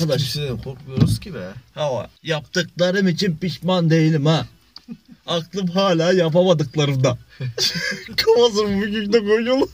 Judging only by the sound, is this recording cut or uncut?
cut